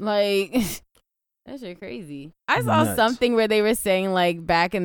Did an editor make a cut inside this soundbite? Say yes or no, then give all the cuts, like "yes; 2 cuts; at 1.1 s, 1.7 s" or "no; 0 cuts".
yes; 1 cut; at 2.4 s